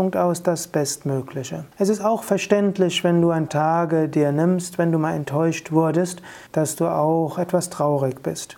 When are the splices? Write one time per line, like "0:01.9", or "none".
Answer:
0:01.7
0:03.5
0:06.5